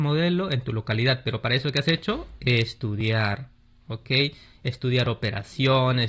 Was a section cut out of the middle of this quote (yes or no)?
no